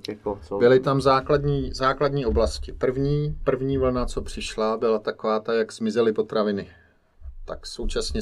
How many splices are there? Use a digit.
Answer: 0